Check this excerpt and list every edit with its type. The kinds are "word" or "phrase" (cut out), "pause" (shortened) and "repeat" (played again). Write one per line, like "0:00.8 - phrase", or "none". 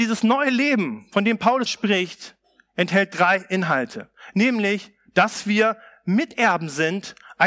0:01.7 - word

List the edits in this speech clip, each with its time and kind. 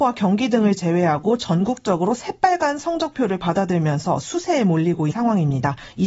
0:05.1 - word

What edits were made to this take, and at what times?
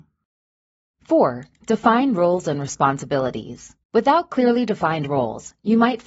0:03.8 - pause

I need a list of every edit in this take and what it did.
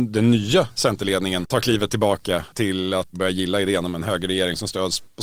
0:03.1 - word

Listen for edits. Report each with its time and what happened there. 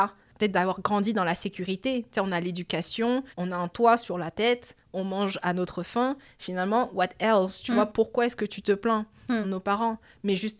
0:03.3 - pause
0:09.4 - phrase

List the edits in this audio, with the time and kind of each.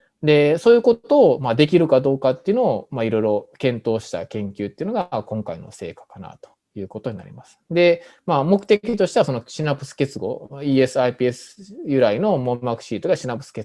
none

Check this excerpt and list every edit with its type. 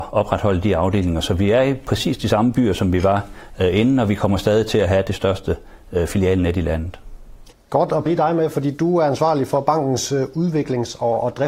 0:07.5 - pause
0:08.1 - phrase

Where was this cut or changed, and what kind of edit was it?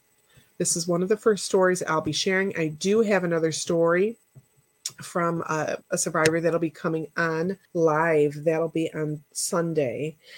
0:05.8 - pause
0:07.7 - pause
0:09.3 - pause

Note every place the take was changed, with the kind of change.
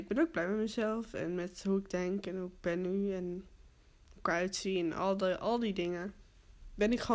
none

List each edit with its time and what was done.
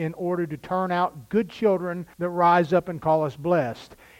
0:02.1 - pause

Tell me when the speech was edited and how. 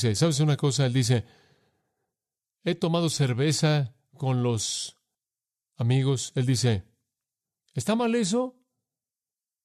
none

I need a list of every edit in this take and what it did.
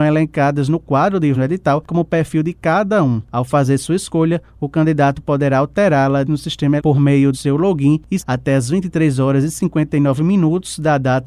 0:01.3 - word
0:01.9 - word
0:06.2 - word
0:06.8 - word
0:07.3 - word
0:08.2 - word

